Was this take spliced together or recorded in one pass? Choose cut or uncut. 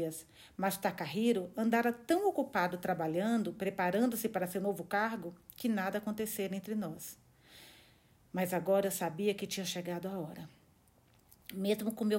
uncut